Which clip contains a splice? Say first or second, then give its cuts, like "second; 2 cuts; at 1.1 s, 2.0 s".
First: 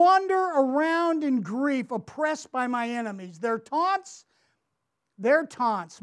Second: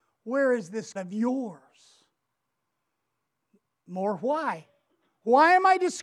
second; 1 cut; at 1.0 s